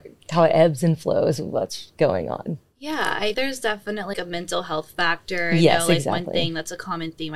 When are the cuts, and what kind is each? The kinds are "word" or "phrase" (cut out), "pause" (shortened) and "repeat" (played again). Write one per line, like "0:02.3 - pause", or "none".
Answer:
0:03.3 - word
0:04.1 - word